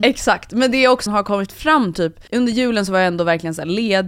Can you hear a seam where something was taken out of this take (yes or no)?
yes